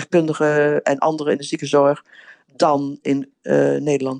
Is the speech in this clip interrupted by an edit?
no; 0 cuts

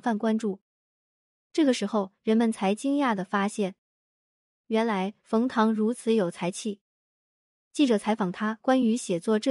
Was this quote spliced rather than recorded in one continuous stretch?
no; 0 cuts

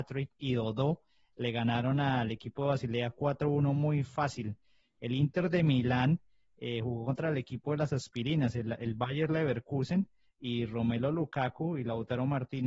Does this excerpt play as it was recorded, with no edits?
yes; 0 cuts

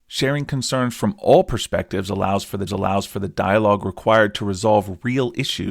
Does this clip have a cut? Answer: yes; 1 cut; at 2.7 s

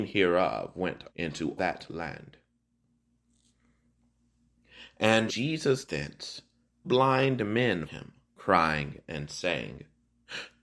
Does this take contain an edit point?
yes; 6 cuts; at 1.1 s, 1.6 s, 5.3 s, 5.8 s, 6.8 s, 7.9 s

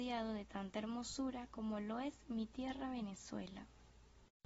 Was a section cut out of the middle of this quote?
no; 0 cuts

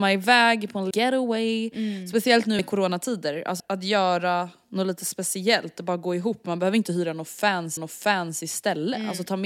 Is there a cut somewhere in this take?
yes; 4 cuts; at 0.9 s, 2.6 s, 3.6 s, 7.8 s

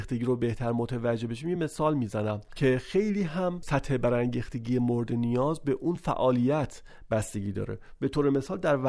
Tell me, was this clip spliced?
no; 0 cuts

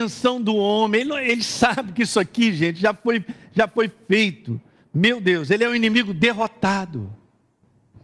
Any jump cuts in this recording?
no; 0 cuts

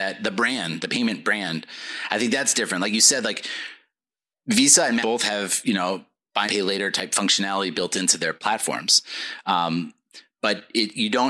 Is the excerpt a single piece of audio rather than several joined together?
no; 2 cuts; at 5.0 s, 6.5 s

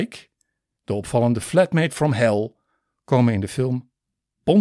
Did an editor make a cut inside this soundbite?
no; 0 cuts

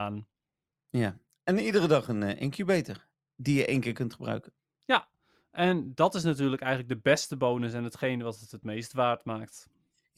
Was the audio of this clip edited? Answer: no; 0 cuts

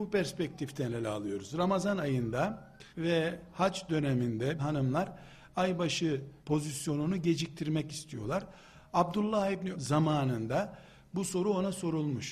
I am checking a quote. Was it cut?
yes; 4 cuts; at 2.9 s, 4.6 s, 6.4 s, 9.7 s

